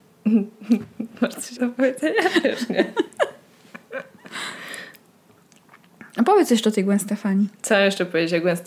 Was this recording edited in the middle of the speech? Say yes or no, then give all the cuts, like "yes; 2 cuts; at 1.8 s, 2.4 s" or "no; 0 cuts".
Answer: yes; 1 cut; at 1.6 s